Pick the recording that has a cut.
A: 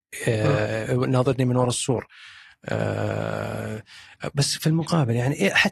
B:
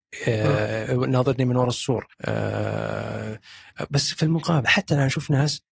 B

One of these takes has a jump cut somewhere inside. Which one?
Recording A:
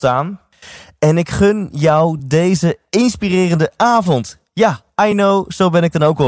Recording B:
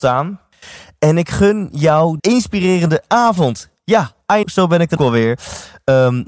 B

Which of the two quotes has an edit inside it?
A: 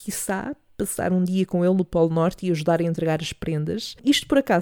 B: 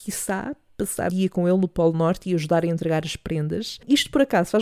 B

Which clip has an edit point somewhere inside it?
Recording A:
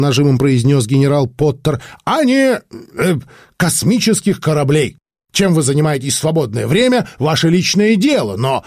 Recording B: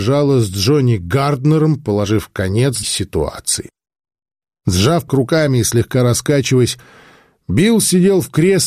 B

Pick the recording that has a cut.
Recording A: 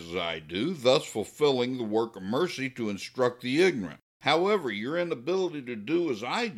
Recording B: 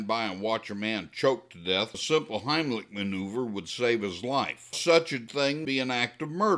B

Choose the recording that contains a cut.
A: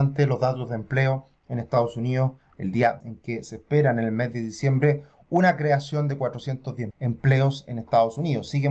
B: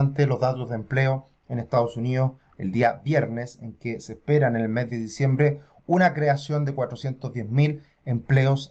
A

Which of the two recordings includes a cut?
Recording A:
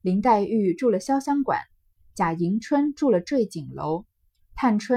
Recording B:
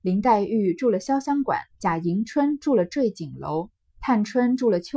B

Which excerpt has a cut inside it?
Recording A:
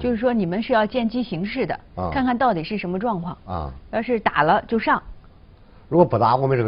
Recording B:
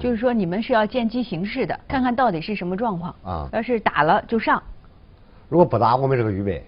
B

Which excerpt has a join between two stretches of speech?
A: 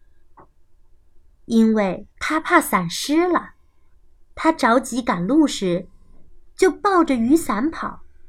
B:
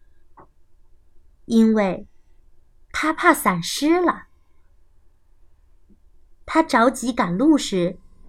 A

